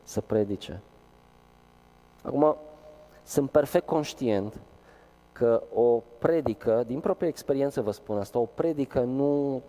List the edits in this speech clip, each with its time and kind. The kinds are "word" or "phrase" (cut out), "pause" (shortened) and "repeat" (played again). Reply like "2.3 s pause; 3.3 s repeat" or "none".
none